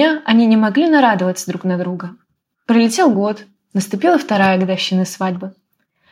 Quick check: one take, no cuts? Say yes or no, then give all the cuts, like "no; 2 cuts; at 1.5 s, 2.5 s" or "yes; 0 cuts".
yes; 0 cuts